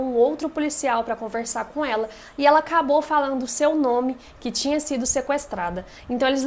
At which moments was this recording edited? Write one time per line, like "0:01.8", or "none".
none